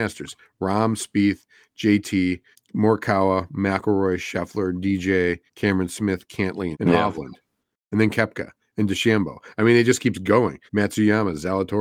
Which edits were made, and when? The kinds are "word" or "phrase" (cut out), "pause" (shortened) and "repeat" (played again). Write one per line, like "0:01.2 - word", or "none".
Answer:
0:02.5 - pause
0:05.5 - pause
0:06.7 - phrase
0:10.7 - pause